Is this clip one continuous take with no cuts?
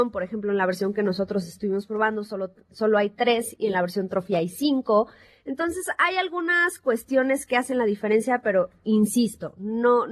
yes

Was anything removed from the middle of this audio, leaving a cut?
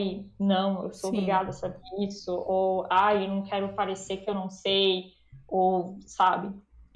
no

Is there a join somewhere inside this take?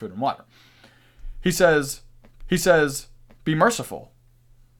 yes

